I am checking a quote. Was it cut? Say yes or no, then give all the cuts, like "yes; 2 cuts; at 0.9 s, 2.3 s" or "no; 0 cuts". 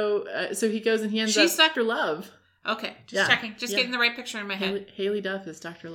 yes; 1 cut; at 1.7 s